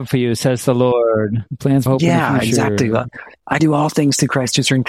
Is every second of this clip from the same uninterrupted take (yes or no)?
no